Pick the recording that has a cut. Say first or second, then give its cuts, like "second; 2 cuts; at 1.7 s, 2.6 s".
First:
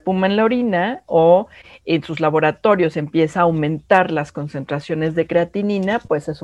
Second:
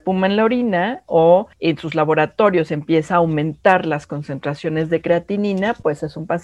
second; 1 cut; at 1.5 s